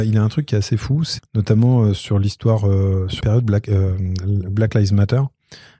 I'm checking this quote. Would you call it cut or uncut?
cut